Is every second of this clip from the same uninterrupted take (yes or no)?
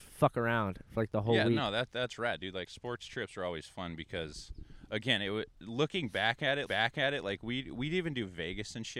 no